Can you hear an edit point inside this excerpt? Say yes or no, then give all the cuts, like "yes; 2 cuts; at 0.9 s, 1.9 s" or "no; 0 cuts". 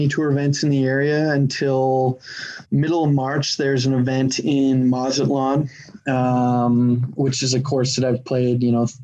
yes; 1 cut; at 2.6 s